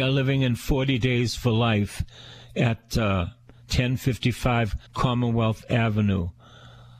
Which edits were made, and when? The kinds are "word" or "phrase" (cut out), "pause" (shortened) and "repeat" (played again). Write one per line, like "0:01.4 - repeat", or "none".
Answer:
0:04.9 - pause